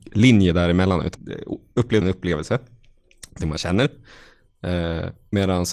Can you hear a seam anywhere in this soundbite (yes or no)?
yes